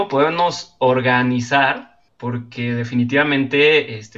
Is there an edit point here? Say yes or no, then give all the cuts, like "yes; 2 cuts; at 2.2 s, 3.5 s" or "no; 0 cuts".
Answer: yes; 1 cut; at 2.1 s